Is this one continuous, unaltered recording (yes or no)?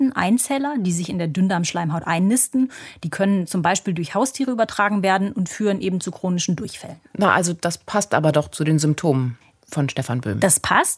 yes